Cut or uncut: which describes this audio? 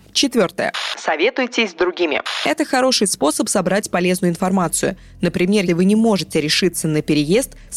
cut